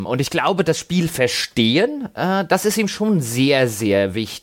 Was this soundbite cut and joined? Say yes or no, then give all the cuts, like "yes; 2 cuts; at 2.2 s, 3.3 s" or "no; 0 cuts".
no; 0 cuts